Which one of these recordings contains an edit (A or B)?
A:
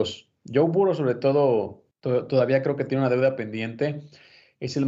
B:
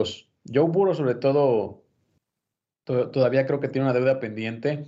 A